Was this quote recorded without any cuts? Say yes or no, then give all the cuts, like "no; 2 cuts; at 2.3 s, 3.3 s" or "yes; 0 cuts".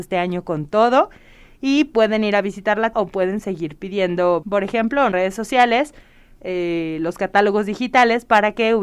no; 3 cuts; at 2.9 s, 4.4 s, 5.1 s